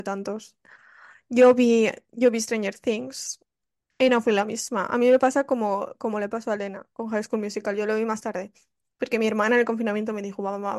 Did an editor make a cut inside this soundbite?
no; 0 cuts

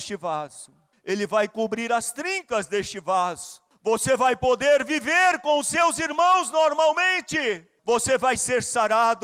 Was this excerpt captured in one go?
no; 3 cuts; at 0.9 s, 3.7 s, 7.8 s

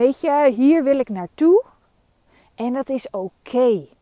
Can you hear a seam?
no; 0 cuts

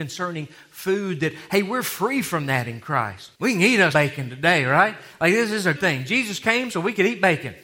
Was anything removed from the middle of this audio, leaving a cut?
yes; 3 cuts; at 3.3 s, 3.9 s, 5.7 s

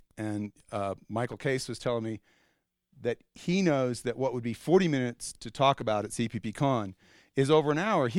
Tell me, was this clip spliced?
no; 0 cuts

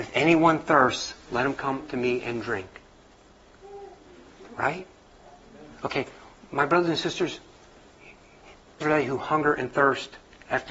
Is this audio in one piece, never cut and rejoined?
no; 1 cut; at 8.8 s

